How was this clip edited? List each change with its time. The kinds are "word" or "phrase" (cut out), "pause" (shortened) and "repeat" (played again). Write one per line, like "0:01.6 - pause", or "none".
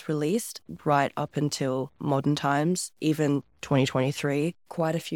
0:02.0 - pause

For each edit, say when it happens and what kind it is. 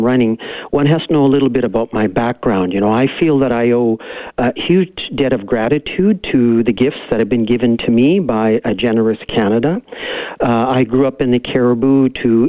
none

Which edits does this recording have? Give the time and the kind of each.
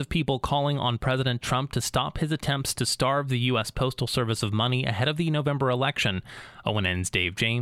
0:01.4 - word

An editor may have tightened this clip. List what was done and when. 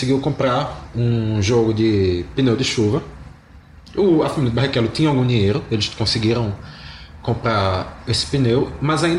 none

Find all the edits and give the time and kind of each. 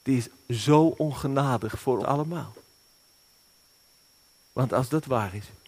0:02.0 - word

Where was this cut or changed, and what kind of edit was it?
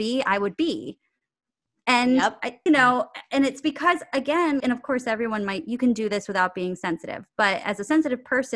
0:02.7 - word
0:04.6 - word

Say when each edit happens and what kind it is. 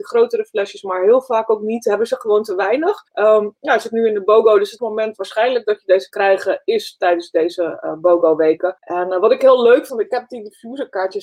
0:03.1 - pause
0:04.8 - word
0:06.1 - word
0:08.8 - pause
0:09.9 - word

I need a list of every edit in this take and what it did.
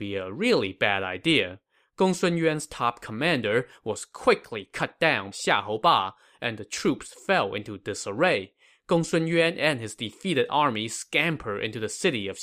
0:05.3 - word

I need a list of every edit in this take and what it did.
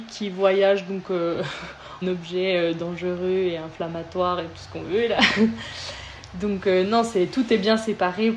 0:02.0 - phrase

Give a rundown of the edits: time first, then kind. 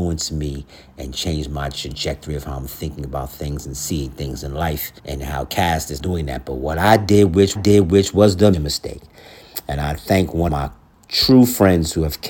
0:05.0 - pause
0:06.0 - word
0:07.6 - repeat
0:08.5 - word
0:10.5 - word
0:11.0 - word

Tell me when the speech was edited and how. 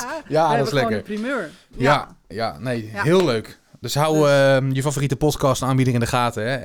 none

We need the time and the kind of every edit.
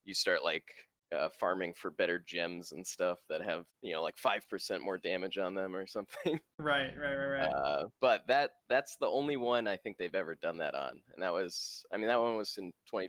0:03.7 - pause
0:07.9 - pause

